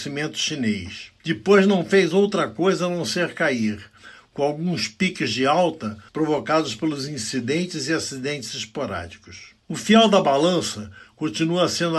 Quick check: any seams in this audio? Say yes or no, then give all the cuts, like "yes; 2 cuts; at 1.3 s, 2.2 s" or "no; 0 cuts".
yes; 1 cut; at 6.1 s